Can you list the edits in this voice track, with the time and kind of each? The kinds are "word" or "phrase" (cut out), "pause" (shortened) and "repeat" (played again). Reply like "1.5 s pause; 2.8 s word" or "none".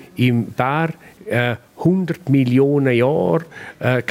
none